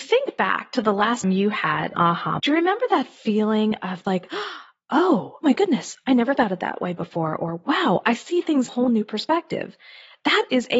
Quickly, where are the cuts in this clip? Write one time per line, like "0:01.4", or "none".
0:01.2
0:01.9
0:02.4
0:04.0
0:05.4
0:06.3
0:08.7